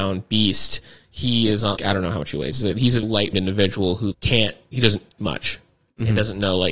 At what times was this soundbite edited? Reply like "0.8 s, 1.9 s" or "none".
1.8 s, 3.0 s, 3.3 s, 4.1 s, 5.2 s